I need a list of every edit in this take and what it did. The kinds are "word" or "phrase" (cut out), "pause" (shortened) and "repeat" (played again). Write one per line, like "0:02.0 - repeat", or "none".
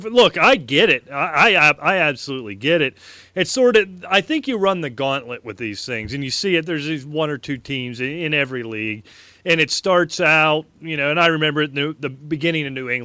none

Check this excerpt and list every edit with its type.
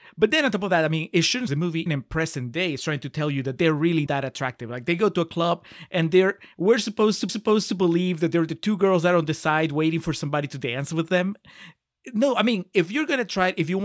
0:01.5 - phrase
0:01.9 - word
0:04.1 - word
0:07.3 - repeat

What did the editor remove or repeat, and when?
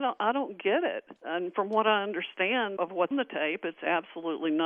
0:01.2 - pause
0:02.8 - word
0:03.1 - word

